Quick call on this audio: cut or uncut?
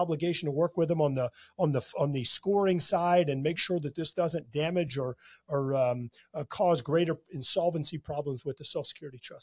uncut